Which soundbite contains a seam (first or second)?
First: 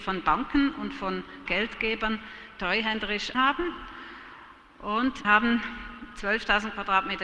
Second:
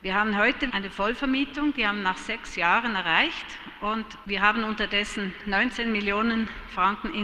first